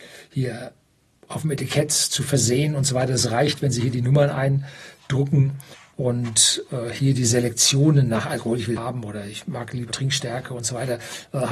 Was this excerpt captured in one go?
no; 3 cuts; at 5.7 s, 8.8 s, 9.9 s

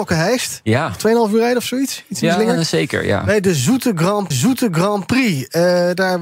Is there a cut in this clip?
yes; 1 cut; at 4.3 s

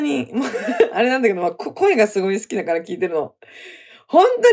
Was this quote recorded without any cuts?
yes; 0 cuts

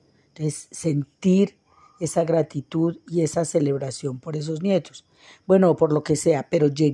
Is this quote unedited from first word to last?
yes; 0 cuts

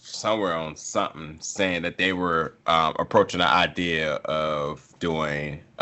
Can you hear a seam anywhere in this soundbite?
no; 0 cuts

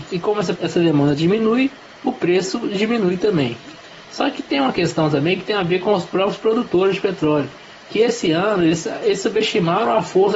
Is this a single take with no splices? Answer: yes; 0 cuts

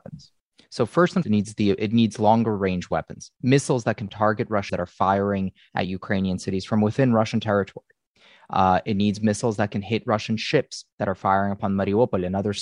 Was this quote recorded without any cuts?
no; 3 cuts; at 1.2 s, 3.3 s, 4.7 s

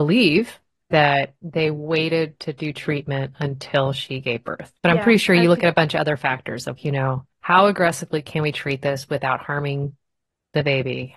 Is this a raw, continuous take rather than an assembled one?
no; 4 cuts; at 1.4 s, 4.8 s, 6.8 s, 7.3 s

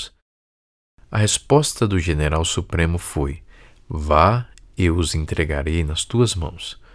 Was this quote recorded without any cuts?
yes; 0 cuts

